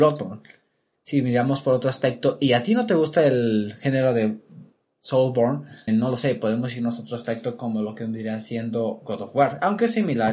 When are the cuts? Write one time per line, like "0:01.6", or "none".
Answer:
0:05.9